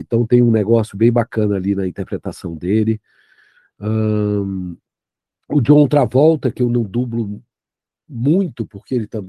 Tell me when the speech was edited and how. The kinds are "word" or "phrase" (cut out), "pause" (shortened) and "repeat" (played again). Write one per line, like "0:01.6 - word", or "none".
none